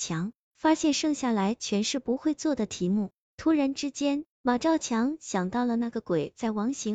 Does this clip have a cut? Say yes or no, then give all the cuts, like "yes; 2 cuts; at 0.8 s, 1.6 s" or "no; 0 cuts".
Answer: yes; 1 cut; at 4.3 s